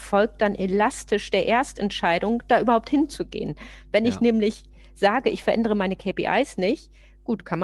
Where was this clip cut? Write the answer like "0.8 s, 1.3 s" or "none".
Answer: none